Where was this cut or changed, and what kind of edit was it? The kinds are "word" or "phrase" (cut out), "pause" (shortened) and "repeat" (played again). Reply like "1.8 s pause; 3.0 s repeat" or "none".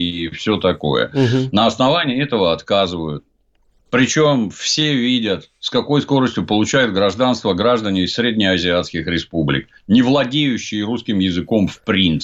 none